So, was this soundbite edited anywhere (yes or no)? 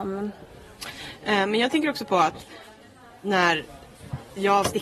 no